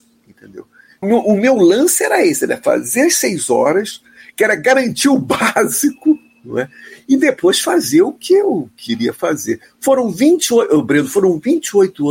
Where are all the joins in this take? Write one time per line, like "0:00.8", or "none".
0:01.0